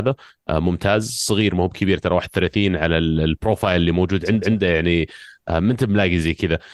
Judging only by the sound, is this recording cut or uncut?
cut